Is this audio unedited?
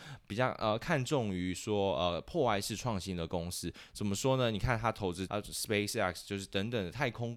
no; 1 cut; at 5.3 s

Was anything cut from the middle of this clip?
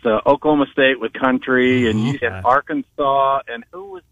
yes; 2 cuts; at 1.1 s, 2.2 s

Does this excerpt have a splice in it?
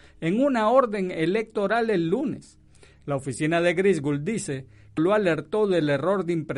yes; 1 cut; at 5.0 s

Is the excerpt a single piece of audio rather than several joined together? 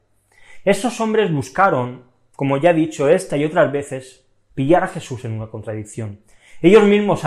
yes; 0 cuts

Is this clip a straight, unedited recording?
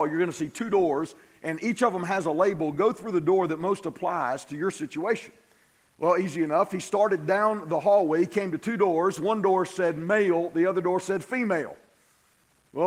yes; 0 cuts

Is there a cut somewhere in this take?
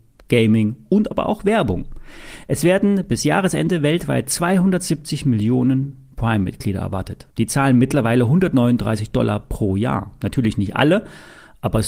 yes; 1 cut; at 7.3 s

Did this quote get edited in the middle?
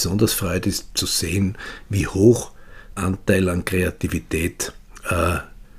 yes; 1 cut; at 3.0 s

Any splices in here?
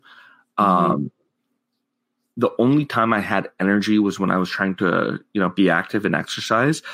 no; 0 cuts

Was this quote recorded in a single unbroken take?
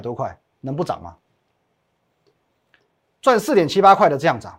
yes; 0 cuts

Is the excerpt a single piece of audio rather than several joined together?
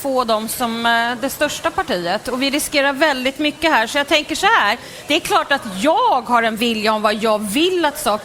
yes; 0 cuts

